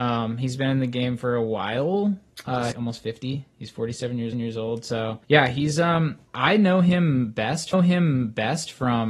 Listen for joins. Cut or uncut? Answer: cut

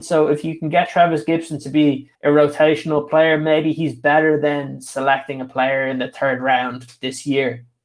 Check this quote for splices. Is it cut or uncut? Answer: cut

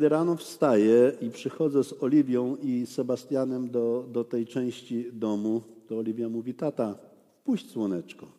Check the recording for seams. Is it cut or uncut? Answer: uncut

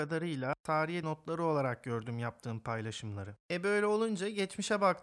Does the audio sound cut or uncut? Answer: cut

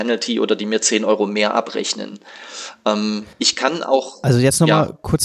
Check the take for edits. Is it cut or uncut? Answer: cut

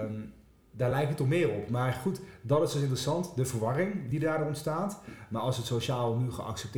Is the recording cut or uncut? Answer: uncut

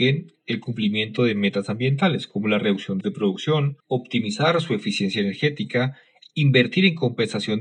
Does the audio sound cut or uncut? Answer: cut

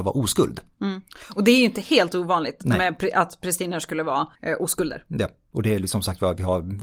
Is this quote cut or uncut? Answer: cut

